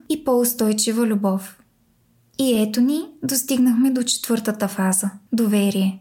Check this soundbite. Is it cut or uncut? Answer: uncut